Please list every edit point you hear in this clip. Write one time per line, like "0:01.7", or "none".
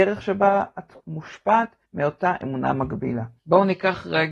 0:01.0
0:01.8
0:03.4